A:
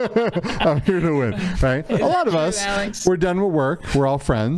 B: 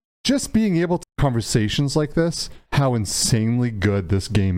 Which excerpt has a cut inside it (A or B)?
B